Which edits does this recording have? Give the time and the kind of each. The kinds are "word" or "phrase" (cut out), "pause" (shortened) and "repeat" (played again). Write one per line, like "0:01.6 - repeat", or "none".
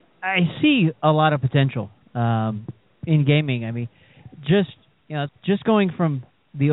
0:04.9 - pause
0:05.3 - phrase